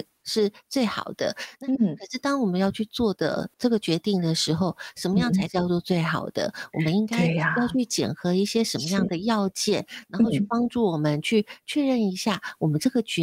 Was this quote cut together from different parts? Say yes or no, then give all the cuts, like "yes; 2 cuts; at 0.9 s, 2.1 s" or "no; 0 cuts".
yes; 1 cut; at 3.5 s